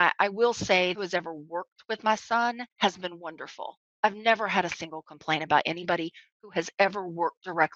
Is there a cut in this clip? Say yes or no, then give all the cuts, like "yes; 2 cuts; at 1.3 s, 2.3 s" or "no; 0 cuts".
yes; 2 cuts; at 0.9 s, 2.7 s